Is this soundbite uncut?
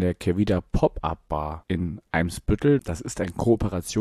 yes; 0 cuts

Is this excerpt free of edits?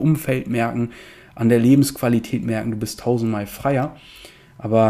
yes; 0 cuts

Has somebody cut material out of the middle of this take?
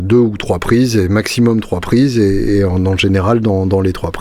no; 0 cuts

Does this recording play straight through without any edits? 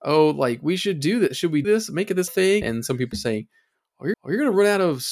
no; 5 cuts; at 1.6 s, 2.3 s, 2.6 s, 3.1 s, 4.1 s

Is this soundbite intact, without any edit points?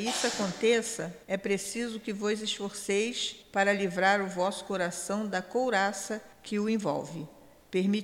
no; 3 cuts; at 1.2 s, 3.4 s, 6.3 s

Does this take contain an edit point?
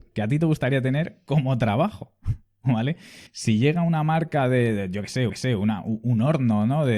yes; 2 cuts; at 3.3 s, 5.3 s

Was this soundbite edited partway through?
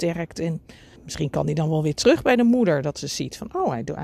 yes; 1 cut; at 1.0 s

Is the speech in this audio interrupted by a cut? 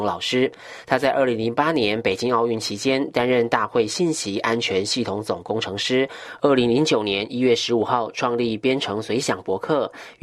no; 0 cuts

